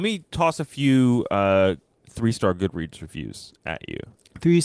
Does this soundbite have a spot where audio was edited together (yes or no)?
no